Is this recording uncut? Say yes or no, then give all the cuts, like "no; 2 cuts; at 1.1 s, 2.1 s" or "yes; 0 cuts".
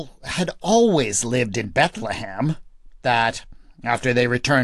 no; 1 cut; at 3.0 s